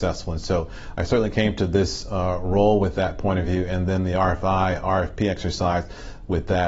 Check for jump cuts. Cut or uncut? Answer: uncut